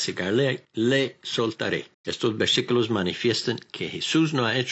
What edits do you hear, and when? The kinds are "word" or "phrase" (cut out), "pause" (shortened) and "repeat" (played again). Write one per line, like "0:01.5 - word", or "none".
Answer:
0:01.9 - pause